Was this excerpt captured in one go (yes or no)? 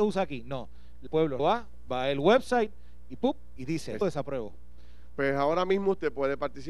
no